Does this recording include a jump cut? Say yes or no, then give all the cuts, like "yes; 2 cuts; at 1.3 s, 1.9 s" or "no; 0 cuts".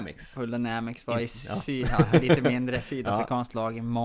no; 0 cuts